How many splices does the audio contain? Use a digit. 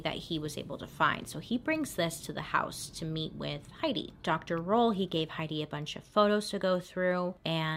0